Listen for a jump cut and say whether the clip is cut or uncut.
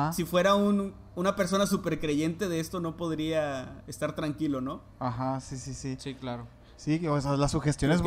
uncut